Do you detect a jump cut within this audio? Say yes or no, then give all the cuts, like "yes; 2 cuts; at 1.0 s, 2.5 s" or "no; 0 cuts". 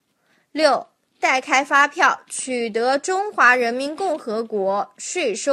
no; 0 cuts